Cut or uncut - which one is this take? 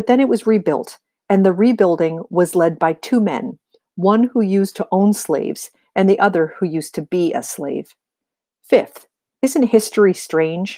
uncut